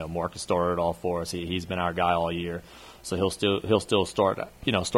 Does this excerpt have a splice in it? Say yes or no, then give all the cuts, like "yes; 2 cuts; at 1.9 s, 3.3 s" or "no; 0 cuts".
no; 0 cuts